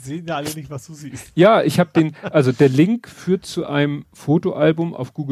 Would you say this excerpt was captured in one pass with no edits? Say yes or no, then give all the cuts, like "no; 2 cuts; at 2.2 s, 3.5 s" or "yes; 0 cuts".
yes; 0 cuts